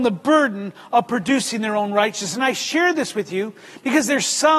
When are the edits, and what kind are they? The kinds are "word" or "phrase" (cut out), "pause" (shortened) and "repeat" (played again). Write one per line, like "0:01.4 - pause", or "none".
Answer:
none